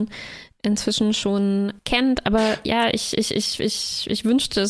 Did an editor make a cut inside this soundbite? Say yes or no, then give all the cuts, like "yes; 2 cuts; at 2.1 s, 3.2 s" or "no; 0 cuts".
yes; 1 cut; at 1.8 s